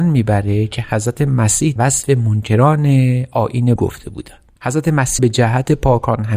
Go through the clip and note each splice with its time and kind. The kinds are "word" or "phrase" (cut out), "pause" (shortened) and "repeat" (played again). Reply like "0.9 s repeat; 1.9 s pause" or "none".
1.8 s word; 3.8 s word; 5.2 s word